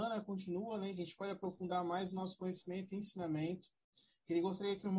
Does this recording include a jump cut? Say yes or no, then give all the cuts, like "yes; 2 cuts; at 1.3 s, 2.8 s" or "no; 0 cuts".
no; 0 cuts